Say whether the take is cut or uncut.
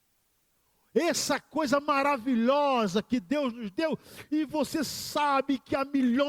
uncut